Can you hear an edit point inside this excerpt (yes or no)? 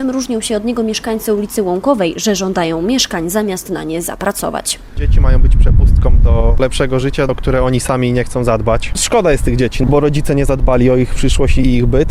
no